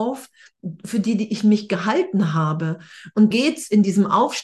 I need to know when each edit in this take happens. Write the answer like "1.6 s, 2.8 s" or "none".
3.3 s